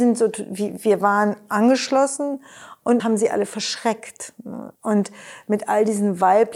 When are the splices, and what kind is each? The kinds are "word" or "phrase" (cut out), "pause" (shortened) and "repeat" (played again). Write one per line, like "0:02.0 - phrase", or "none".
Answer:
0:03.0 - word
0:04.7 - pause